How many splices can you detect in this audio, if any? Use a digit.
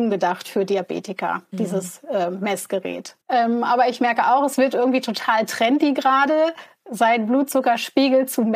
1